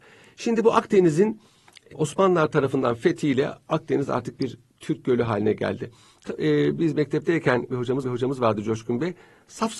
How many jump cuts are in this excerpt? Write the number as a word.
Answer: three